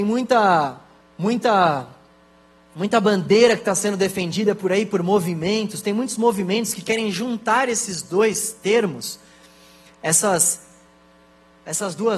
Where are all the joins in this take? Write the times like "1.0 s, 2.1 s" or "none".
1.0 s